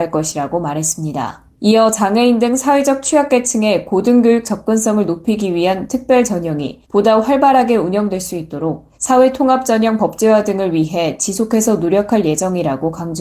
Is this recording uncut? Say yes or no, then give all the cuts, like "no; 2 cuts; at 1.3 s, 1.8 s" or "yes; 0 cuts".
no; 3 cuts; at 1.5 s, 6.8 s, 8.9 s